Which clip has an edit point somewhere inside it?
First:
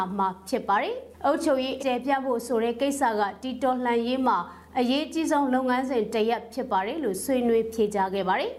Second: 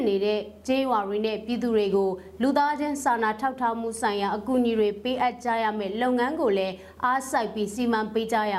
first; 1 cut; at 1.8 s

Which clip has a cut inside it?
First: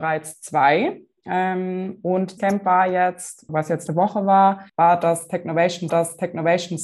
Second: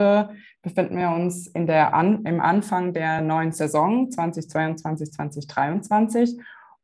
first; 5 cuts; at 2.4 s, 3.5 s, 3.9 s, 4.7 s, 5.9 s

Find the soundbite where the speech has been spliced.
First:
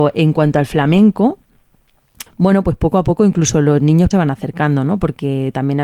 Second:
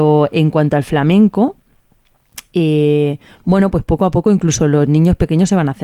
first; 2 cuts; at 2.3 s, 4.1 s

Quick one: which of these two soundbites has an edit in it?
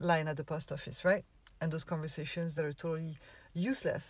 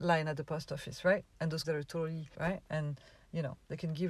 second; 3 cuts; at 1.3 s, 1.6 s, 2.3 s

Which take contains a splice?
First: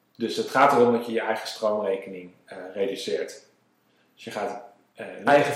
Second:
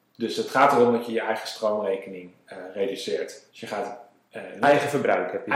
second; 1 cut; at 3.5 s

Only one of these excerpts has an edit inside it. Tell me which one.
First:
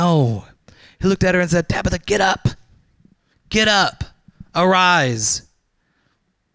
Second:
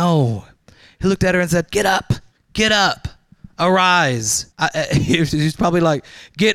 second; 3 cuts; at 1.7 s, 2.3 s, 4.5 s

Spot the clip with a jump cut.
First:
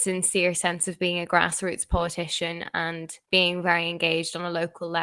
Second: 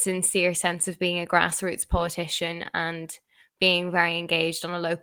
first; 1 cut; at 3.3 s

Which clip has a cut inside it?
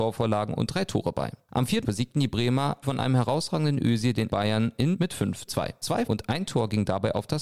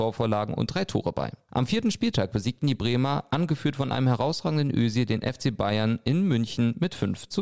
first; 6 cuts; at 1.8 s, 2.8 s, 4.3 s, 4.9 s, 5.5 s, 6.1 s

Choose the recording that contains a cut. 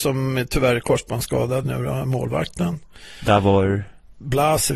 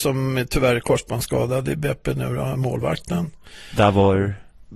first; 1 cut; at 1.6 s

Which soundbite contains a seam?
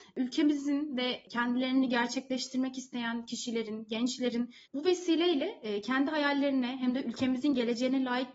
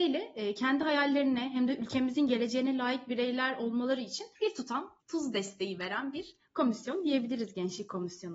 second; 2 cuts; at 4.4 s, 5.0 s

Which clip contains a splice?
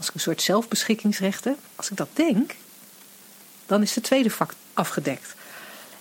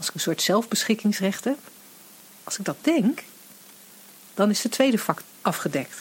first; 1 cut; at 1.7 s

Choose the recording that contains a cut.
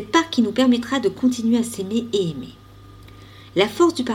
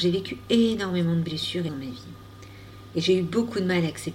second; 1 cut; at 1.7 s

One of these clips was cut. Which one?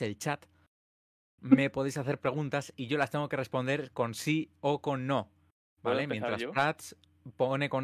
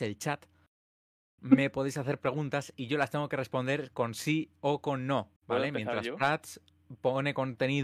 second; 1 cut; at 5.4 s

